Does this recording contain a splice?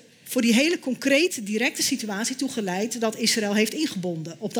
no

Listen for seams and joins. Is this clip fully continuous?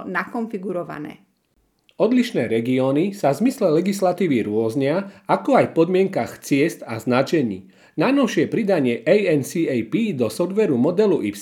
yes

